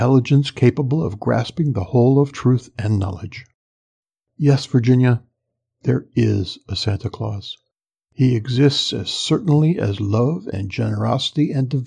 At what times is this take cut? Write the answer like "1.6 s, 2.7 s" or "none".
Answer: none